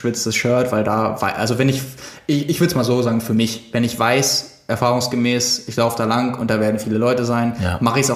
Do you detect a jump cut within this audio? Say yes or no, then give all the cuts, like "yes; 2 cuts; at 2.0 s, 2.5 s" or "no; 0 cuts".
no; 0 cuts